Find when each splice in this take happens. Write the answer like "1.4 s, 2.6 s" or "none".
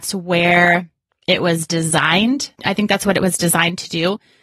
2.6 s